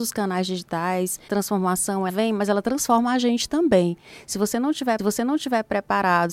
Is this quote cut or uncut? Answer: cut